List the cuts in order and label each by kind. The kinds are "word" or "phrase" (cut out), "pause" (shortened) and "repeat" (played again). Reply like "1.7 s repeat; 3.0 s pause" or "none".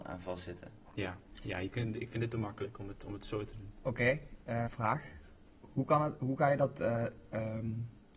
4.6 s word